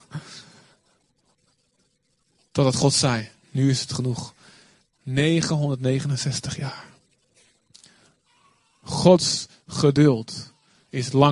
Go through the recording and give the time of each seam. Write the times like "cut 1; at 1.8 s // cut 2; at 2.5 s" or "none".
cut 1; at 3.4 s